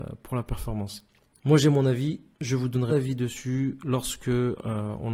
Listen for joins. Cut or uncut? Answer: cut